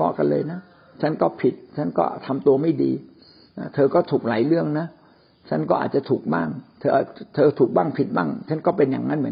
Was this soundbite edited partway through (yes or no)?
no